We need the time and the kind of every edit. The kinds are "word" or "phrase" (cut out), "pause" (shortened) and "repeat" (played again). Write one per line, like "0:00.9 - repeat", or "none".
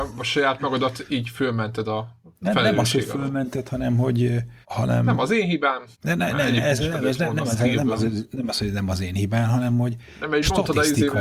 0:04.6 - pause
0:05.9 - pause